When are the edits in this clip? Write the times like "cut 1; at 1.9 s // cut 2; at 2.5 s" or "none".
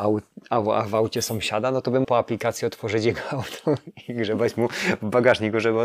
cut 1; at 2.0 s